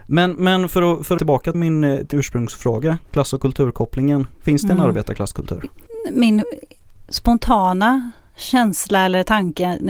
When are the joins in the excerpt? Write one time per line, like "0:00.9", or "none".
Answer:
0:01.2
0:01.5
0:02.1
0:03.0
0:04.3